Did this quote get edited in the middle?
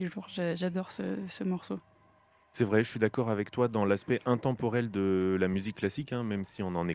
no; 0 cuts

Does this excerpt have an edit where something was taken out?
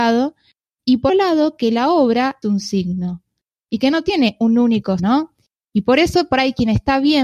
yes; 3 cuts; at 1.1 s, 2.4 s, 5.0 s

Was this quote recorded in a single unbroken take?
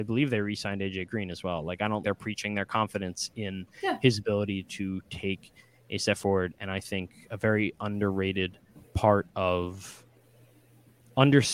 no; 1 cut; at 2.0 s

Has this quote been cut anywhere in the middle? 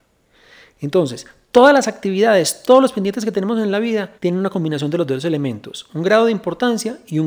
yes; 1 cut; at 4.2 s

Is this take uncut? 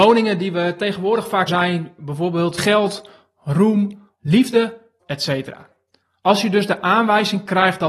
no; 4 cuts; at 1.5 s, 2.6 s, 4.1 s, 5.0 s

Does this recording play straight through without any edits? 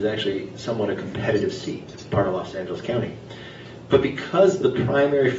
yes; 0 cuts

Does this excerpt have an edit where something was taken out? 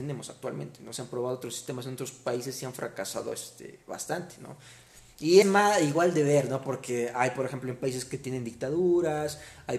yes; 1 cut; at 5.4 s

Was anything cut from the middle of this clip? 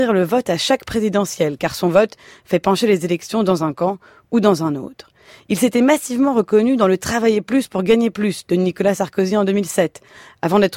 no; 0 cuts

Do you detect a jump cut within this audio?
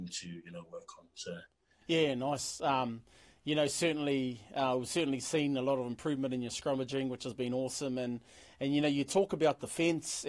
no; 0 cuts

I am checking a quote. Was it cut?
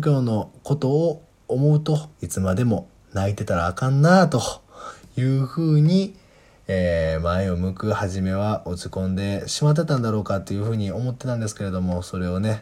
yes; 1 cut; at 2.1 s

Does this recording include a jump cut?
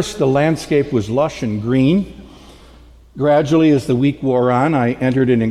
no; 0 cuts

